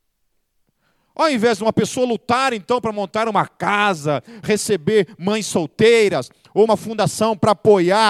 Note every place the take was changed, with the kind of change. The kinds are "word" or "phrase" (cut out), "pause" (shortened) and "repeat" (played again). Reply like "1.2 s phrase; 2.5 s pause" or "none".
4.4 s word; 6.7 s word